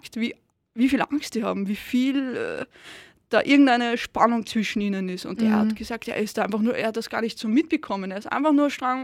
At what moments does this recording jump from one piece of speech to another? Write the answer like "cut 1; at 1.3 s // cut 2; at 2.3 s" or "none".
none